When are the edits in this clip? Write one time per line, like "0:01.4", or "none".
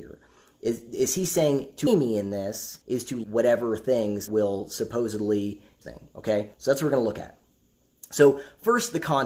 0:01.9
0:02.8
0:03.2
0:04.3
0:05.8
0:06.5